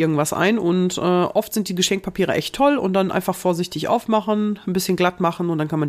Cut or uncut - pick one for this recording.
uncut